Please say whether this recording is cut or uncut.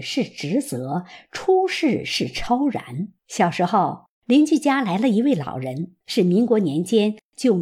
cut